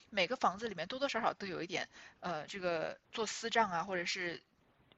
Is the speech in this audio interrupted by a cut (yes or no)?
yes